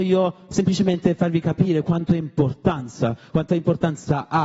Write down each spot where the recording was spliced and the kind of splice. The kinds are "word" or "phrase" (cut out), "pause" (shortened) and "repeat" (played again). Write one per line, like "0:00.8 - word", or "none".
none